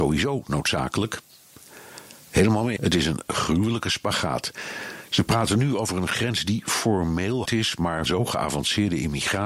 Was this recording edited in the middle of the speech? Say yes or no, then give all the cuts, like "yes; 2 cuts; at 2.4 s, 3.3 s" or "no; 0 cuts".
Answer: yes; 3 cuts; at 2.8 s, 7.5 s, 8.1 s